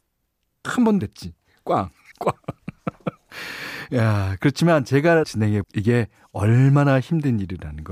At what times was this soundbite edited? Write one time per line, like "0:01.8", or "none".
0:01.0
0:02.1
0:05.2
0:05.6